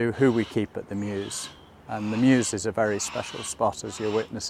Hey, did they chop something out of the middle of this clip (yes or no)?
no